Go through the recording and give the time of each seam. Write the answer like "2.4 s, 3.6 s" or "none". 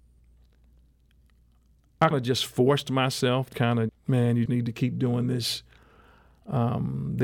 2.1 s, 3.5 s, 3.9 s, 4.5 s